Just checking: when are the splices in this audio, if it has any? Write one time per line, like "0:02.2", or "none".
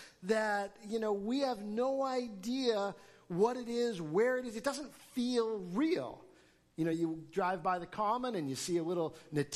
none